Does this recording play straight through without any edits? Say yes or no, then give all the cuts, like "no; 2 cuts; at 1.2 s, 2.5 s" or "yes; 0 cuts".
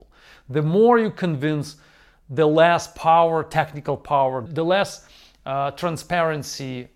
yes; 0 cuts